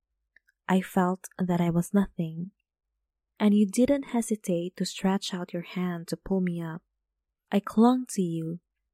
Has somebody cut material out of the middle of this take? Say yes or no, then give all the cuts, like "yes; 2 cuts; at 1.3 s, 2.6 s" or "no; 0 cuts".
no; 0 cuts